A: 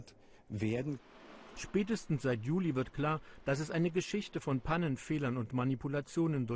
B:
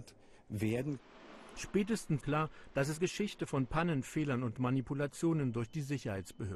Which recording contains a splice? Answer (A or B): B